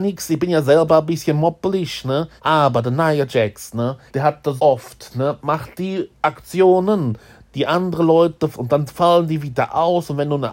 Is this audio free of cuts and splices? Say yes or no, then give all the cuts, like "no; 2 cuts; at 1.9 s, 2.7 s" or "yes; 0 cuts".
no; 5 cuts; at 2.4 s, 4.1 s, 4.6 s, 6.1 s, 8.5 s